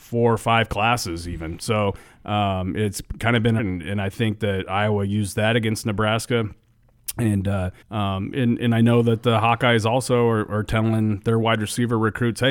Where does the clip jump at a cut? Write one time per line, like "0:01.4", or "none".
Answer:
0:03.6
0:07.8

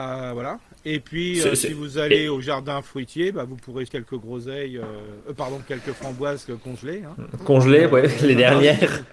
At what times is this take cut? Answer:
0:03.9

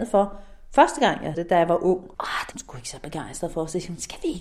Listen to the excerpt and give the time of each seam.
0:01.3
0:02.1
0:02.5

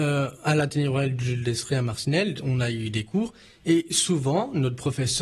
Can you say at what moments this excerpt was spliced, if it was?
none

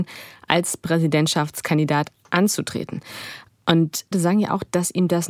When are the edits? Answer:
0:04.1

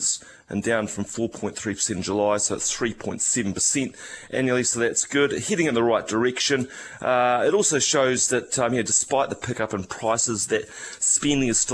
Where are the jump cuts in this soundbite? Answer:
none

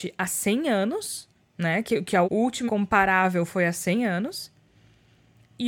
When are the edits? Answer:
0:01.4
0:02.2
0:02.7

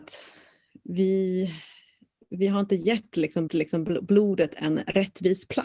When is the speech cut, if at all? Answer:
0:03.5

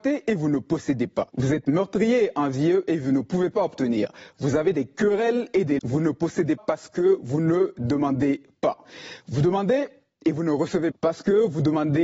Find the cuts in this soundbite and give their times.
0:01.3
0:05.8
0:06.6
0:10.9

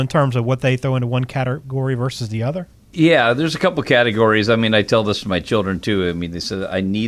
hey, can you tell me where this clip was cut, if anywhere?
none

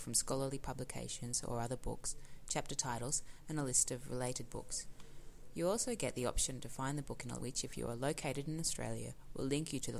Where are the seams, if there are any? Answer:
0:07.4

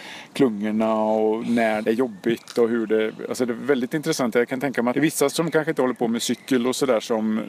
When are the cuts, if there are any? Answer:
0:01.8
0:04.9
0:05.3

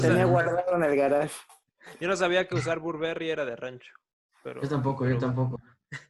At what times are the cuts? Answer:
none

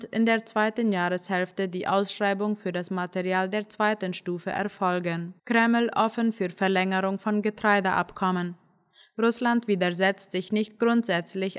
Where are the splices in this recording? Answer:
0:05.4

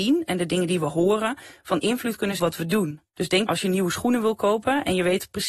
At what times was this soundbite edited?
0:02.4
0:03.1
0:03.5

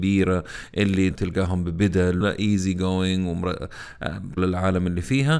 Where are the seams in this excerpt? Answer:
0:01.1
0:02.2
0:04.4

